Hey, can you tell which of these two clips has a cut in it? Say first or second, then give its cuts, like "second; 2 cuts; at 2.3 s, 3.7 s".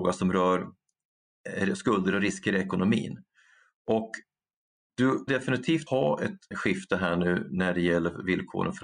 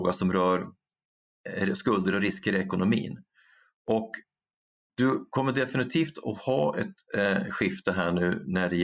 first; 3 cuts; at 5.3 s, 5.9 s, 6.5 s